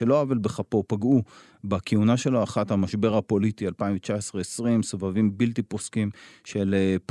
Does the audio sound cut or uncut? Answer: uncut